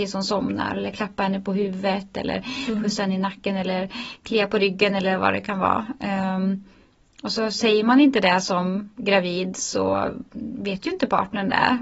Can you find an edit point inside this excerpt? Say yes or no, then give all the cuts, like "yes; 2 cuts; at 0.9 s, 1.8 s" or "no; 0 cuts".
no; 0 cuts